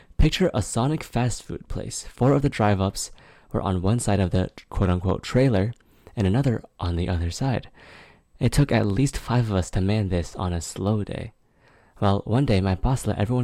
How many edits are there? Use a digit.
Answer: 0